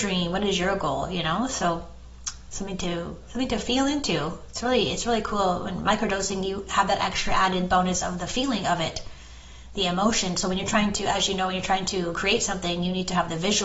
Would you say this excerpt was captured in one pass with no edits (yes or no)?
yes